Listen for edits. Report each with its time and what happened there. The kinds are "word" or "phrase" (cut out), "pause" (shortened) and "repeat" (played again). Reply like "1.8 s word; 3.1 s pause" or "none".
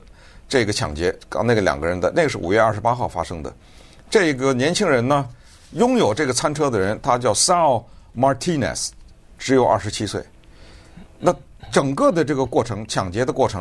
none